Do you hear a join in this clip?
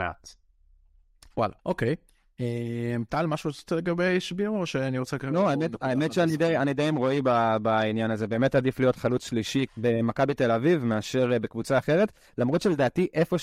yes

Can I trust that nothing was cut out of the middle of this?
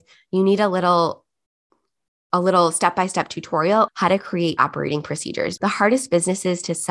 no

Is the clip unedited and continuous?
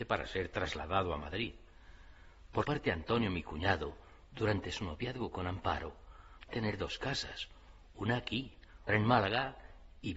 no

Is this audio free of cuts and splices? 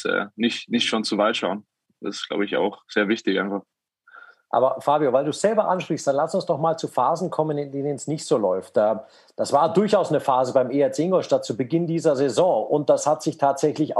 yes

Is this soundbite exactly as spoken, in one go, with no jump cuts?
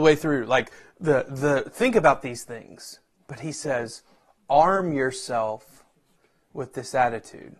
yes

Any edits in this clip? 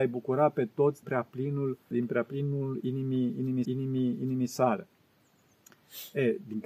yes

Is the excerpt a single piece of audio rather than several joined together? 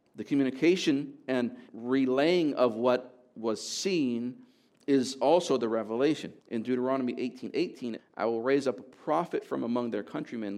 no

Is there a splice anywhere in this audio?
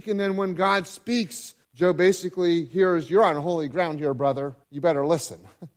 yes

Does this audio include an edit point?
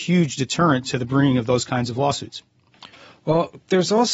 no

